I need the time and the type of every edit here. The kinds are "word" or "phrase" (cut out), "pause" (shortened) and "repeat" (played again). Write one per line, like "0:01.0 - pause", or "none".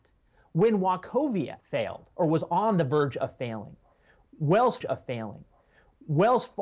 0:01.6 - pause
0:04.8 - repeat